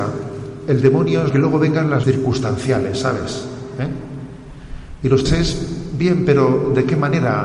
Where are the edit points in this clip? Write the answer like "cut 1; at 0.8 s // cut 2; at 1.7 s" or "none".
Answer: cut 1; at 1.3 s // cut 2; at 2.0 s // cut 3; at 5.3 s